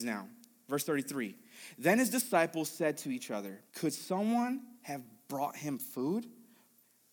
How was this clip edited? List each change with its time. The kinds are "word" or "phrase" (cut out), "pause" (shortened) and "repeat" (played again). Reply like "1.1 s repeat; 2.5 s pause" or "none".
3.7 s pause